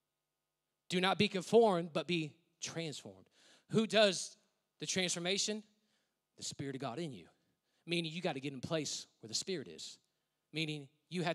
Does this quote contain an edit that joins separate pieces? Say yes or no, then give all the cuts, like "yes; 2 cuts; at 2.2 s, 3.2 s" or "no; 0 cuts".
no; 0 cuts